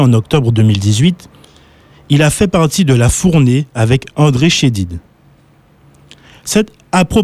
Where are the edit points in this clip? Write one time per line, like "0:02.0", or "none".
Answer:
none